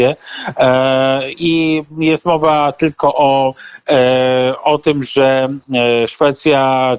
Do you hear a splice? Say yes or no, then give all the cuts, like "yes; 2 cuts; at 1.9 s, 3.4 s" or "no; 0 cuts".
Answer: no; 0 cuts